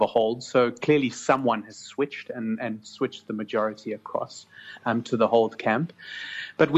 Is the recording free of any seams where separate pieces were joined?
yes; 0 cuts

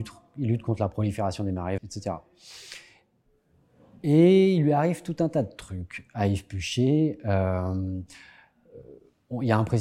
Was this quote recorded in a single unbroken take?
no; 1 cut; at 1.8 s

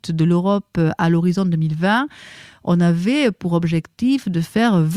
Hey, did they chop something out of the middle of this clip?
no; 0 cuts

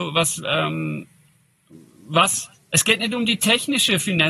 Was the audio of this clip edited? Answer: yes; 1 cut; at 2.6 s

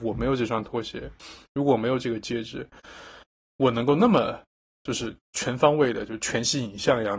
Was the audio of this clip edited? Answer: no; 0 cuts

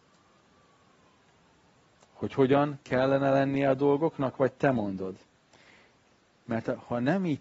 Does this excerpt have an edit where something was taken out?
no; 0 cuts

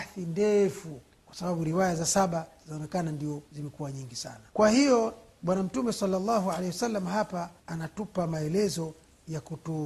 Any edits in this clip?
yes; 4 cuts; at 1.1 s, 3.5 s, 4.5 s, 7.6 s

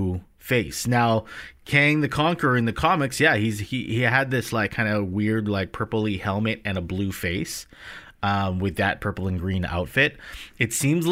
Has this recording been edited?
no; 0 cuts

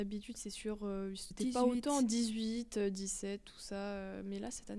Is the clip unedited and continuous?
no; 1 cut; at 1.3 s

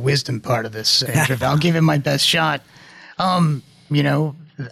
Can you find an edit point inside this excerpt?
yes; 2 cuts; at 1.1 s, 1.4 s

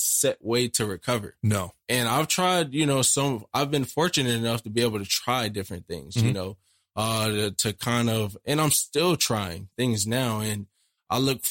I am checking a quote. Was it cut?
no; 0 cuts

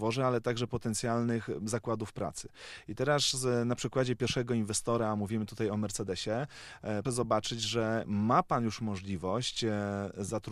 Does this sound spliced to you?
yes; 1 cut; at 7.0 s

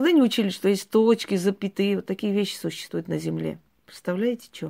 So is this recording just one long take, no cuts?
yes; 0 cuts

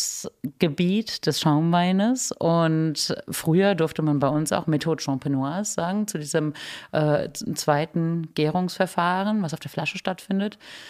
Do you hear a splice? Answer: no; 0 cuts

